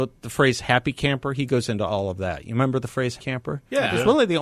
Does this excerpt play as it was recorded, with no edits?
no; 1 cut; at 3.2 s

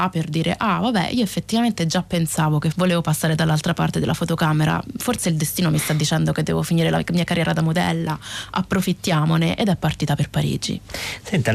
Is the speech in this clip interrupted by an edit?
yes; 1 cut; at 2.7 s

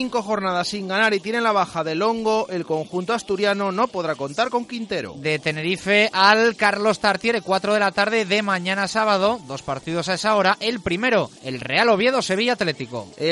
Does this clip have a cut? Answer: yes; 1 cut; at 11.4 s

